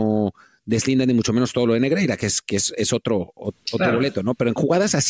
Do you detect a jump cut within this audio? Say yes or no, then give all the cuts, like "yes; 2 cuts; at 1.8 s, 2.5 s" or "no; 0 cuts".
no; 0 cuts